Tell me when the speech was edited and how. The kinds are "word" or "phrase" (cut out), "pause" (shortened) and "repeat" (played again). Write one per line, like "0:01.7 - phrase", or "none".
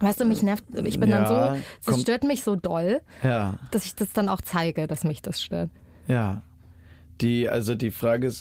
none